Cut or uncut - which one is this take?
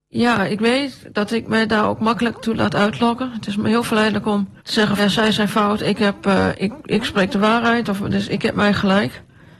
cut